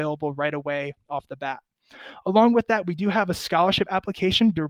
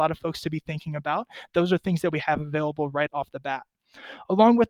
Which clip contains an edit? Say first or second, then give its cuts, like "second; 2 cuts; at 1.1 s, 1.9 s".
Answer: second; 1 cut; at 3.1 s